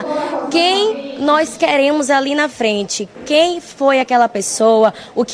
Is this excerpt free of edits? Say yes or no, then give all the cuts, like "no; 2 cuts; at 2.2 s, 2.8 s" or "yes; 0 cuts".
yes; 0 cuts